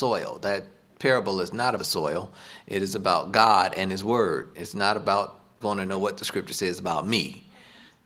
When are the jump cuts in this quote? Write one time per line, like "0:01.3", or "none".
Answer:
0:01.8
0:05.6